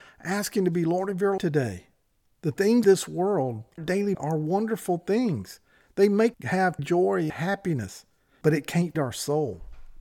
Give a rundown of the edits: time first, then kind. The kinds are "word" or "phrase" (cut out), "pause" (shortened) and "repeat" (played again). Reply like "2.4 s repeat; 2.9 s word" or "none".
1.4 s word; 2.8 s word; 3.8 s word; 4.1 s word; 6.3 s word; 6.8 s word; 7.3 s word; 8.9 s word